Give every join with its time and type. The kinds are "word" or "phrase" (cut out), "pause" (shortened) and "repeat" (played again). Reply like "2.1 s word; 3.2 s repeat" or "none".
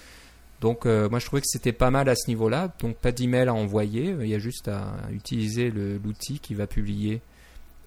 none